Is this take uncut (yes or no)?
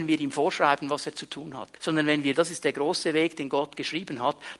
no